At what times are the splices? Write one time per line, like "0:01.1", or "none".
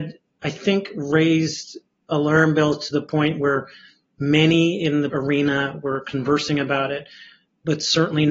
0:05.1